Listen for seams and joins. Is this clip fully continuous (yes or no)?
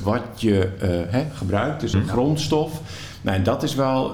no